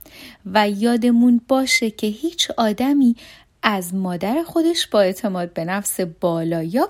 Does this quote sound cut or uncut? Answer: uncut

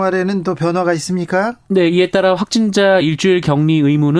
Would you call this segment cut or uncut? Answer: uncut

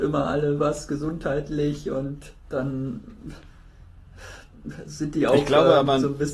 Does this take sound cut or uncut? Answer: cut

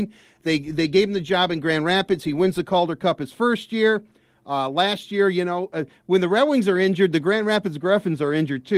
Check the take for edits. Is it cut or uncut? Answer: uncut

